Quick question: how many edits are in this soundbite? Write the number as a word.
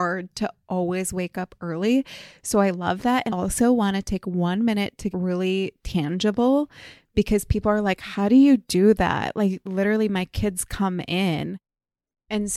two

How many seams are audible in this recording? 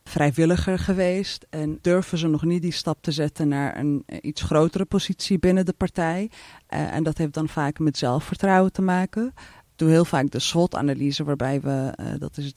zero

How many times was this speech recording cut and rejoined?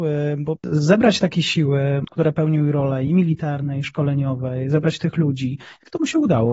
zero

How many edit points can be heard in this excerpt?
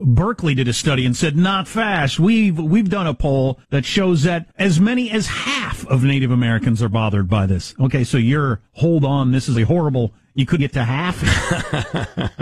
six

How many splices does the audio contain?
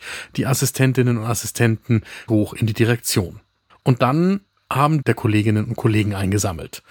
three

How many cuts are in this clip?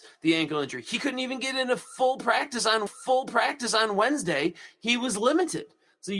one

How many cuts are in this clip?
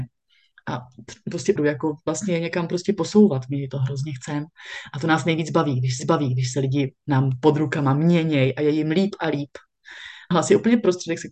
three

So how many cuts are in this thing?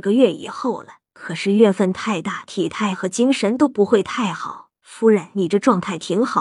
two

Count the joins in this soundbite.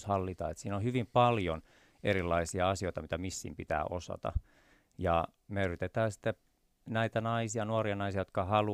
zero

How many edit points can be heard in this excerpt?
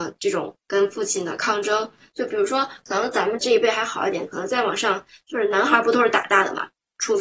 zero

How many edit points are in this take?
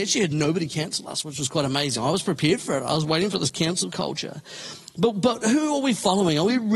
zero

